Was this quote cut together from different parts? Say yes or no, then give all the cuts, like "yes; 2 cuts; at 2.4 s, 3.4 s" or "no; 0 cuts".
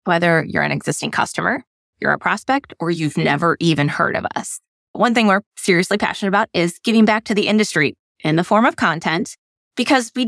no; 0 cuts